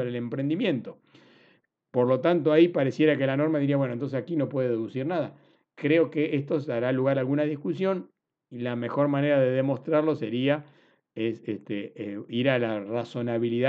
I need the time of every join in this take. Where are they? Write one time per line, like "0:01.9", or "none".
none